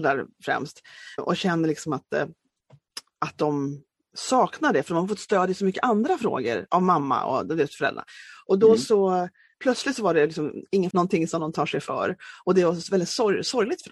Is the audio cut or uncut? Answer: cut